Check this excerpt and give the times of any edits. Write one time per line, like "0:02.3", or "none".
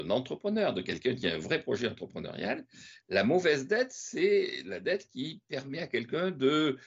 none

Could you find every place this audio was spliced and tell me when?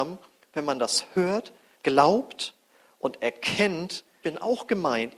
0:01.8
0:04.2

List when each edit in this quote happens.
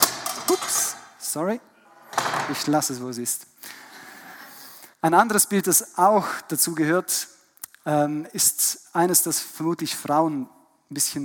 0:04.9

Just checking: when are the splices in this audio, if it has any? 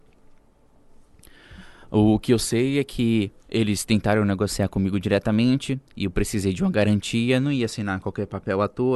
0:03.4
0:05.9

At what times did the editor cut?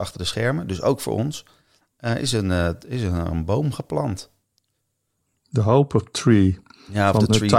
none

